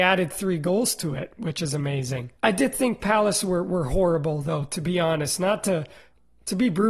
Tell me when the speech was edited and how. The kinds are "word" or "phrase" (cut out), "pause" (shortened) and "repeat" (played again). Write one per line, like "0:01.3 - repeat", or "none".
0:02.4 - pause